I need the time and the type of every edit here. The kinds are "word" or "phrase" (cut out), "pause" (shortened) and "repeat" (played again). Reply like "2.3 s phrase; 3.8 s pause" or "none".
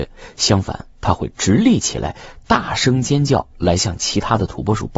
0.9 s pause